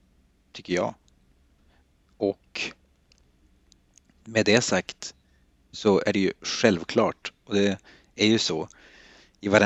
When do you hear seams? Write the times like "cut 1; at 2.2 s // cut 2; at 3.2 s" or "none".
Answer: none

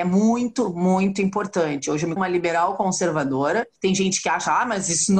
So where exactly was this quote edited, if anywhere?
cut 1; at 2.2 s // cut 2; at 3.8 s

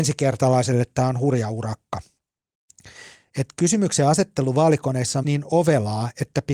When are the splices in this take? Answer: cut 1; at 5.2 s

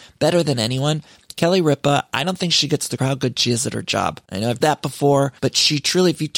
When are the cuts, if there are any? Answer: cut 1; at 3.0 s // cut 2; at 4.2 s // cut 3; at 4.6 s // cut 4; at 5.4 s

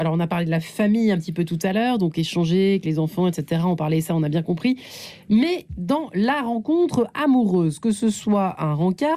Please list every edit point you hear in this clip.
none

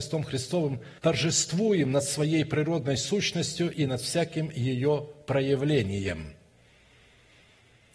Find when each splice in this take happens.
cut 1; at 1.0 s

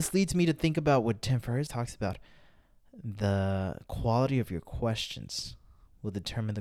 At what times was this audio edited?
cut 1; at 1.7 s

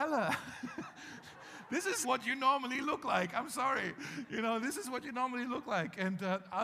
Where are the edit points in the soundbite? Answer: cut 1; at 2.0 s

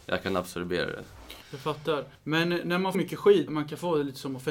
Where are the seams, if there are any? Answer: cut 1; at 1.4 s // cut 2; at 2.1 s // cut 3; at 2.9 s // cut 4; at 3.5 s

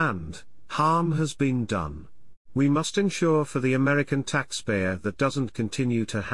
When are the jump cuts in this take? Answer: cut 1; at 2.4 s // cut 2; at 5.2 s

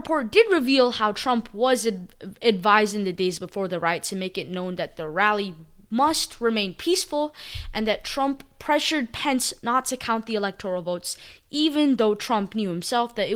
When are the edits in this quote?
none

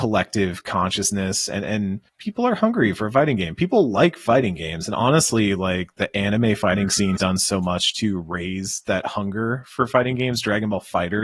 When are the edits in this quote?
cut 1; at 2.1 s // cut 2; at 7.2 s

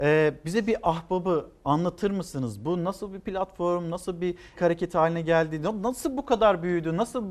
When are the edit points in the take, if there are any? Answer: cut 1; at 4.6 s

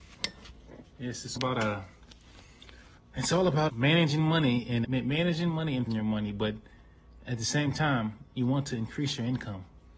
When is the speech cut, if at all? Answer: cut 1; at 0.9 s // cut 2; at 1.4 s // cut 3; at 3.0 s // cut 4; at 3.7 s // cut 5; at 4.8 s // cut 6; at 5.9 s

